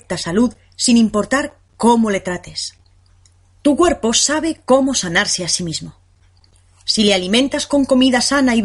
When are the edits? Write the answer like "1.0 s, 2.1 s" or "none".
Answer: 3.3 s